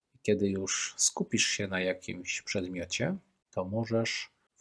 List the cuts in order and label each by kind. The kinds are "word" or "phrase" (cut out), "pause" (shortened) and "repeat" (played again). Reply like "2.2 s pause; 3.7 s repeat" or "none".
none